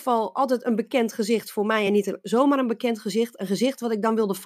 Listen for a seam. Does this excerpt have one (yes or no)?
no